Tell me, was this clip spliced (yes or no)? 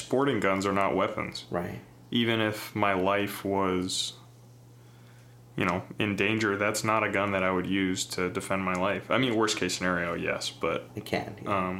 no